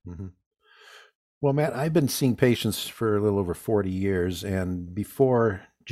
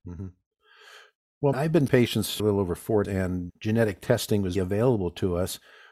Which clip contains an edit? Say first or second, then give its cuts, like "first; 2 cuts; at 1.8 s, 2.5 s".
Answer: second; 6 cuts; at 1.5 s, 1.9 s, 2.4 s, 3.0 s, 3.5 s, 4.6 s